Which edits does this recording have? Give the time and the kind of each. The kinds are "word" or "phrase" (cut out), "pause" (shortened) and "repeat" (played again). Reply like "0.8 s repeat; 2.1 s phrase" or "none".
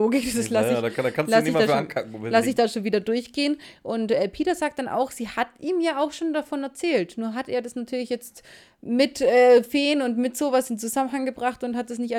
none